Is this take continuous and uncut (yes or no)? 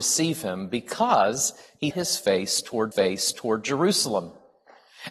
no